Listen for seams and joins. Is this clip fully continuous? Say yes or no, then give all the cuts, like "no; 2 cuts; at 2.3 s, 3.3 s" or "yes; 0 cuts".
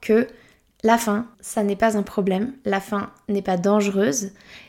no; 1 cut; at 1.3 s